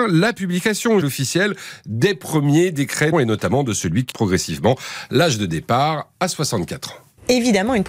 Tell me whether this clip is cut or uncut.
cut